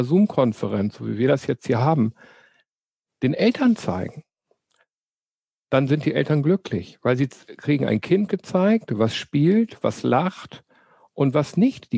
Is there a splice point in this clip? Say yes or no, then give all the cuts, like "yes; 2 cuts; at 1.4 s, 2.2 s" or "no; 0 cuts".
no; 0 cuts